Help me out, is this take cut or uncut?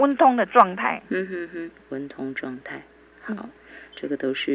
cut